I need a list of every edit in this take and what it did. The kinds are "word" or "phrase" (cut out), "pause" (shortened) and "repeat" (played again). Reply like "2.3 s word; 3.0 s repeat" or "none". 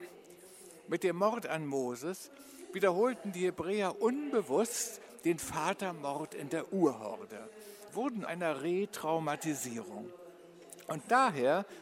7.9 s word; 8.3 s word

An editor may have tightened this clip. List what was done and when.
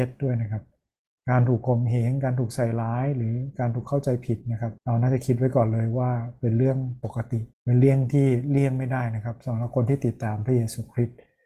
4.8 s pause; 7.5 s pause

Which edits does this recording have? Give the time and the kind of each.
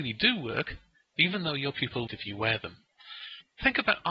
2.1 s phrase

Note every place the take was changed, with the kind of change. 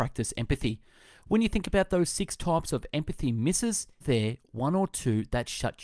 4.0 s word

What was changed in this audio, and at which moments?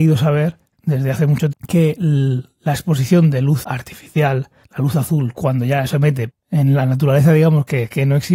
1.5 s word; 3.6 s word; 4.6 s word; 5.9 s word; 6.3 s word

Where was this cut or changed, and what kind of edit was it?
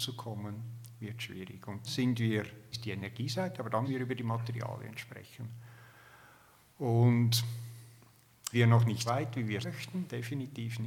1.8 s word; 2.7 s word; 3.8 s word; 8.5 s word; 9.1 s word; 9.6 s word

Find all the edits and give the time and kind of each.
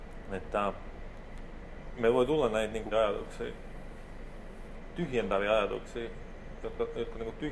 2.9 s word

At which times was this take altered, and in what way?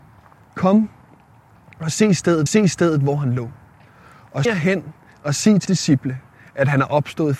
2.5 s repeat; 4.5 s word; 5.7 s word

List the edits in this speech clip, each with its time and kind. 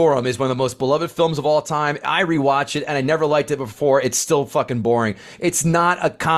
none

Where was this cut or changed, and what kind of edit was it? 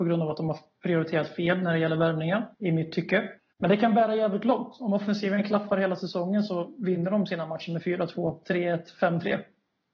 2.5 s pause; 3.4 s pause

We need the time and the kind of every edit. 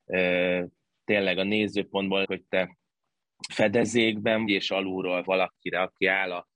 2.2 s word; 3.5 s word; 4.5 s word; 5.3 s word

